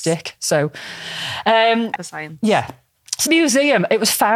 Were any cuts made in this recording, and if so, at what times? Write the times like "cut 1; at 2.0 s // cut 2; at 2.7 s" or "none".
cut 1; at 2.0 s // cut 2; at 3.3 s